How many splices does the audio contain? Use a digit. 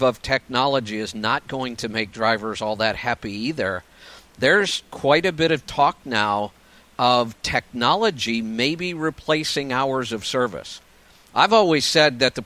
0